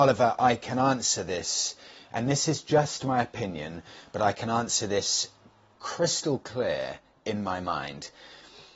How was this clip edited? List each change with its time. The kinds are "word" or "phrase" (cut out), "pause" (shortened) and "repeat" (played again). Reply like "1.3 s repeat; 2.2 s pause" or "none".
none